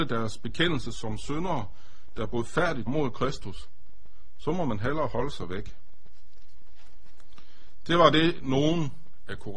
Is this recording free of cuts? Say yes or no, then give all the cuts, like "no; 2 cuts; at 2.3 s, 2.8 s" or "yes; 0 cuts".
no; 1 cut; at 2.9 s